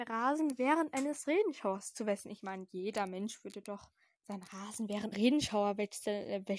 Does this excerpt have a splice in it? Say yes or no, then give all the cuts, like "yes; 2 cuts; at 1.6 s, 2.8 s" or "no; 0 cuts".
yes; 1 cut; at 5.1 s